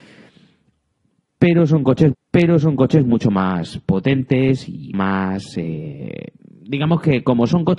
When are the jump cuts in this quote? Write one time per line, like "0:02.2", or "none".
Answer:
0:02.1
0:04.9
0:06.4